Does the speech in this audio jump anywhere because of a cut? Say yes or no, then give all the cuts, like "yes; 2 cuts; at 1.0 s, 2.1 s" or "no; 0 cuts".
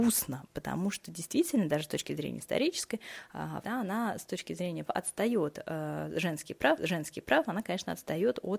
yes; 3 cuts; at 3.6 s, 4.9 s, 6.8 s